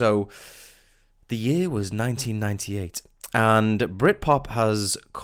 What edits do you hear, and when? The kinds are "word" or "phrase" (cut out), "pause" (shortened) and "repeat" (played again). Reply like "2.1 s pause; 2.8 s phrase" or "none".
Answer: none